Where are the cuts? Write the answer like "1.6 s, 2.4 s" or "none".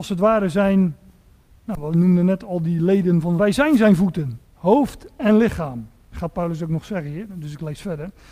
3.4 s, 4.4 s

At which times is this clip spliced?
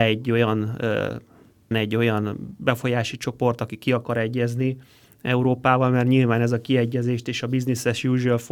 1.7 s

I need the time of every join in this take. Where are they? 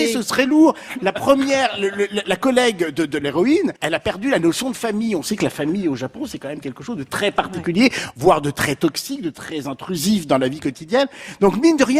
3.8 s

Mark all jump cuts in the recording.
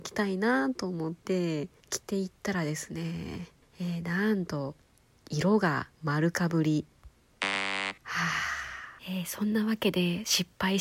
1.8 s, 3.6 s, 5.9 s, 8.0 s, 9.0 s

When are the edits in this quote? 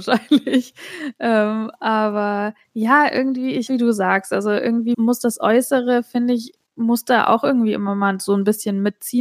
2.6 s, 3.7 s, 4.9 s

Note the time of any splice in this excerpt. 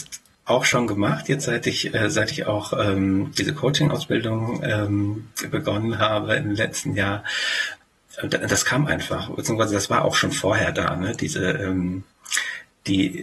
none

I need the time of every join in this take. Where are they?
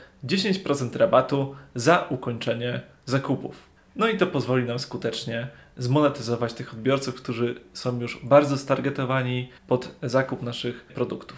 3.8 s, 9.6 s

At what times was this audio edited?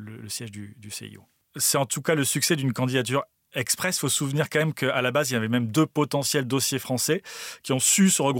none

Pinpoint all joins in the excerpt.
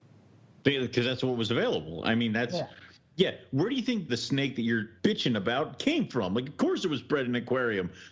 4.1 s, 5.0 s

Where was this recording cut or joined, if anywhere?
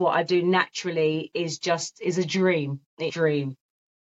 3.1 s

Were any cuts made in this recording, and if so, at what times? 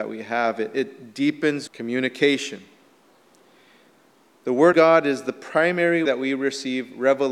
1.7 s, 4.7 s, 6.1 s

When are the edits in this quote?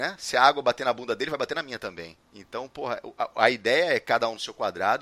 2.2 s

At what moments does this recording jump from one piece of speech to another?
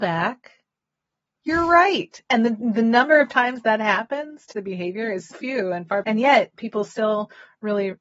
2.2 s, 4.5 s, 5.3 s, 6.0 s

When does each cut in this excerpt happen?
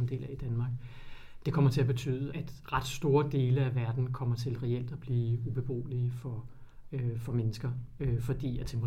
2.3 s

